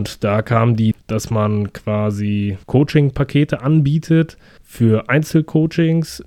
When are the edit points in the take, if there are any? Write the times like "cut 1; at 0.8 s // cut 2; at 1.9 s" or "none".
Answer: cut 1; at 0.9 s // cut 2; at 2.6 s // cut 3; at 4.6 s